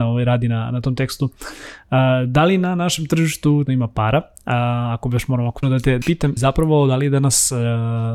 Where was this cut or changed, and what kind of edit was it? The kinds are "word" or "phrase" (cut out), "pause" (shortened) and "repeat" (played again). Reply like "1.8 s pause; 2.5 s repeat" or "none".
3.7 s word; 5.6 s word; 6.0 s word; 6.4 s word